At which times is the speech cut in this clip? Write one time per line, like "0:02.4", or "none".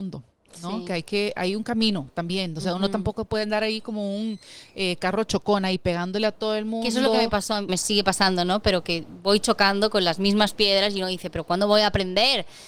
0:07.7